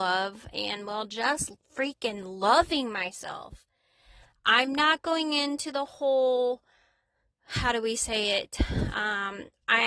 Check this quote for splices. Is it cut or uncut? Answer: uncut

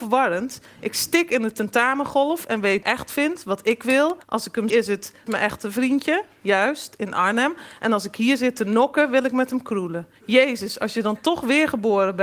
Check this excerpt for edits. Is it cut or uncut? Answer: cut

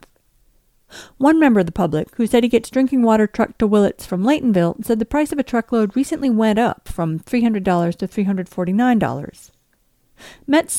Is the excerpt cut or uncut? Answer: uncut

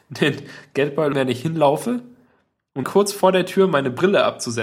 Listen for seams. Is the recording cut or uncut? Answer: cut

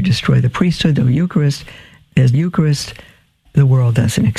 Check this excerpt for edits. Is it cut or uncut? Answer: cut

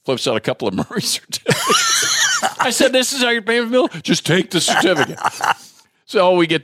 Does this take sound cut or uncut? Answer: uncut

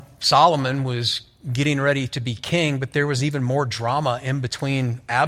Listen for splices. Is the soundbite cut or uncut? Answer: uncut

